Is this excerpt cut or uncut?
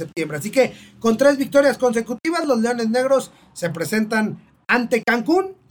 uncut